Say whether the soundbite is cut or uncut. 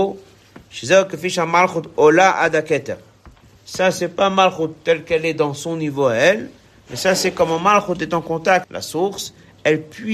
cut